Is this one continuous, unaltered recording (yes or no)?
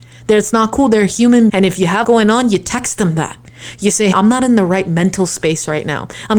no